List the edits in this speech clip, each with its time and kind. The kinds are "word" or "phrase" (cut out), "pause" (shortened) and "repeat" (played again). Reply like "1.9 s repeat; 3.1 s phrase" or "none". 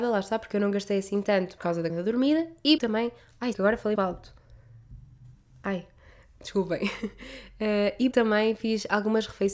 1.6 s word; 1.9 s word; 2.8 s word; 3.5 s word; 4.0 s word; 8.1 s word